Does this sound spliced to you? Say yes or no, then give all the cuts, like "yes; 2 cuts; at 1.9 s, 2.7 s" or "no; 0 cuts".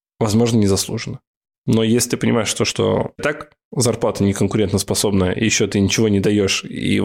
yes; 1 cut; at 3.2 s